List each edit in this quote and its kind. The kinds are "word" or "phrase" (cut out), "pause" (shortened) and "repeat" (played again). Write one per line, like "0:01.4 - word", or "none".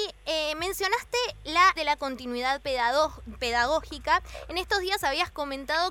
0:01.8 - phrase